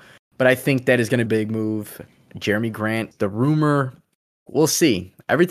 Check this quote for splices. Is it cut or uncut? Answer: cut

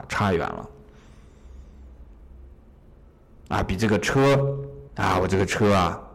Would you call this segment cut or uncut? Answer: cut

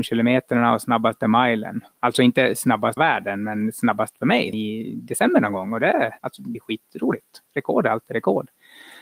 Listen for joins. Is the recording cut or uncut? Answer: cut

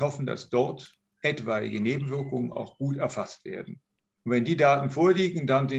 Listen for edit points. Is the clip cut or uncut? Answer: uncut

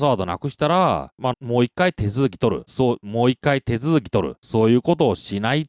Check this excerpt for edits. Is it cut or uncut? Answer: cut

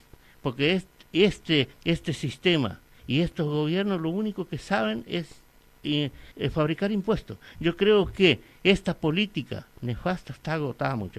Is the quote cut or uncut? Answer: cut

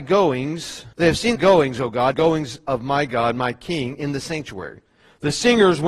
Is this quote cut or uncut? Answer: cut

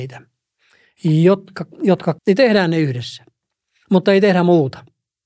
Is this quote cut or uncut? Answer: cut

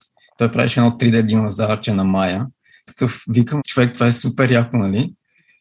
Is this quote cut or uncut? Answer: cut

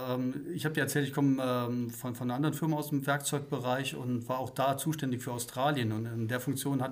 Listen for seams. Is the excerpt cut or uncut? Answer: uncut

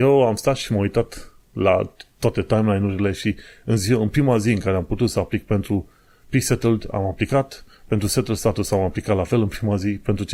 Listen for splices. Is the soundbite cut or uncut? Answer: uncut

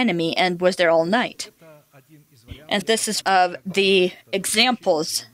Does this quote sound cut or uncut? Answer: cut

